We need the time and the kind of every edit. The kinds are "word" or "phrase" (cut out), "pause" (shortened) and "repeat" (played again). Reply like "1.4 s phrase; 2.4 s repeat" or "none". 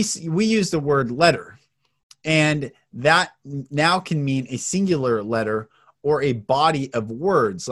none

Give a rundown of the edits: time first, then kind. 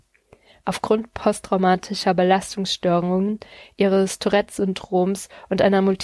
none

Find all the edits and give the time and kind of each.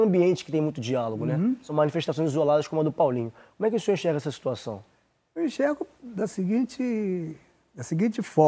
none

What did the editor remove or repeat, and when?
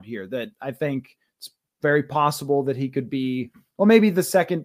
none

